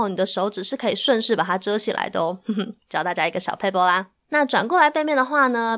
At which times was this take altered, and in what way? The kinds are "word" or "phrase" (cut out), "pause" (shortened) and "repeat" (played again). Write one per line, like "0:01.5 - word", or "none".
0:04.2 - pause